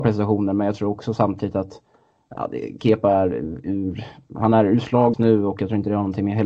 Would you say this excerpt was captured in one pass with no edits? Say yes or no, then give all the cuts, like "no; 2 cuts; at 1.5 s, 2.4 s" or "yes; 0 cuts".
no; 1 cut; at 5.1 s